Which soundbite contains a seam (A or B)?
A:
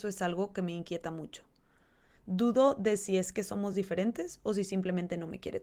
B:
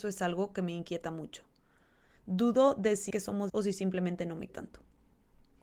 B